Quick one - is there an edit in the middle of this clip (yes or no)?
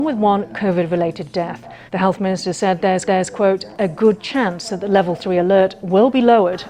yes